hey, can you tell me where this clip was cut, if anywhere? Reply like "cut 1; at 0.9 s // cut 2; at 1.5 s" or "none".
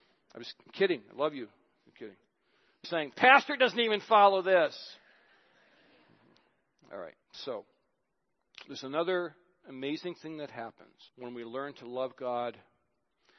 cut 1; at 2.8 s // cut 2; at 7.2 s // cut 3; at 11.1 s